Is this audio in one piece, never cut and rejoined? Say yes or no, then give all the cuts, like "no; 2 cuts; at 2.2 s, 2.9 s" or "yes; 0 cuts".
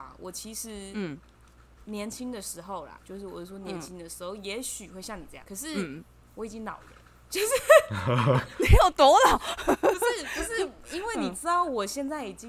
no; 2 cuts; at 3.0 s, 5.4 s